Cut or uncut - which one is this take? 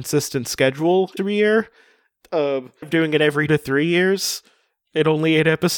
cut